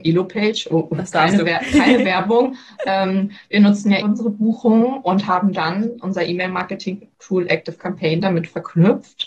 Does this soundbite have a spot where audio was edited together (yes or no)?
yes